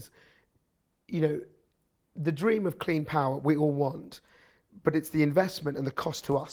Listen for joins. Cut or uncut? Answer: uncut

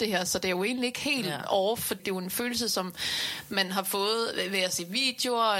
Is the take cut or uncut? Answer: cut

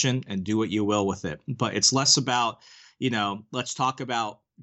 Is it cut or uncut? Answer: uncut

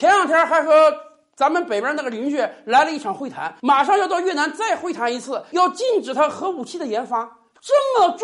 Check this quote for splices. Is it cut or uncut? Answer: uncut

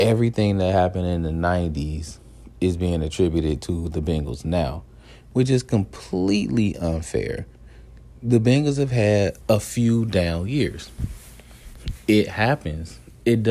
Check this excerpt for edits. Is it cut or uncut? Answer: cut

